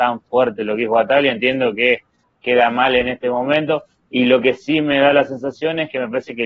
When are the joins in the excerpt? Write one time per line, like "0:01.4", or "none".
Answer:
none